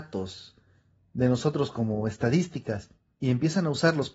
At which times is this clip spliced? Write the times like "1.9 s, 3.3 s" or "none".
none